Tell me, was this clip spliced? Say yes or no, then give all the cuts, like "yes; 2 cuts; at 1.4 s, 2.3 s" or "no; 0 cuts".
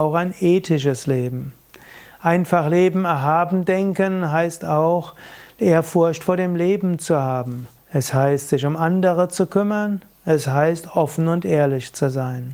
yes; 1 cut; at 7.8 s